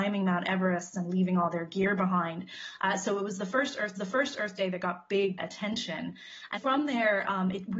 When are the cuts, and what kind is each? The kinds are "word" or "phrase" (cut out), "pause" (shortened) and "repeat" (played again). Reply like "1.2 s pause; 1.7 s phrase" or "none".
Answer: 4.0 s repeat; 5.4 s phrase; 6.6 s word